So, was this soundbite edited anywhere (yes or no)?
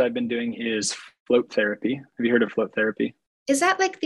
no